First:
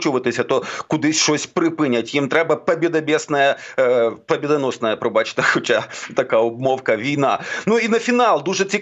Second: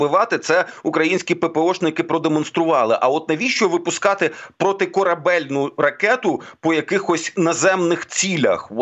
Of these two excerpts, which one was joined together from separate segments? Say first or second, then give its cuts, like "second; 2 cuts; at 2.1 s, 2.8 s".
first; 1 cut; at 6.1 s